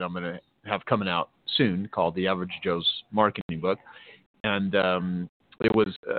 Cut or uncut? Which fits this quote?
uncut